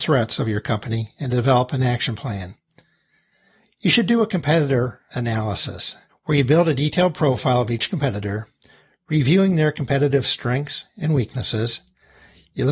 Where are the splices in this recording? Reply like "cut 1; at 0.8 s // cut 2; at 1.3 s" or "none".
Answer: cut 1; at 6.1 s